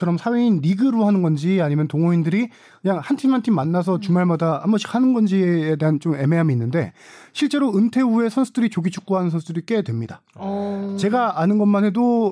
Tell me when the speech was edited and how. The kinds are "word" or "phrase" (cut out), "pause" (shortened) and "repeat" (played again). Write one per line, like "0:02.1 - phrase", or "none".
none